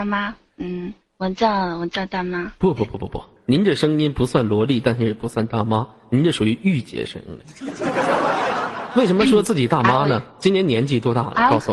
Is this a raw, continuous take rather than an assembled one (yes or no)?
no